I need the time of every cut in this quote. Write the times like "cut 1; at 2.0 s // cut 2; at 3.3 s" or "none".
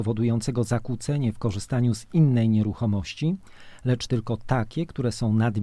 none